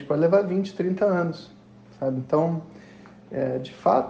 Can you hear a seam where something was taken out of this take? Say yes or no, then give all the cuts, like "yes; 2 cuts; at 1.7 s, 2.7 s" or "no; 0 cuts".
no; 0 cuts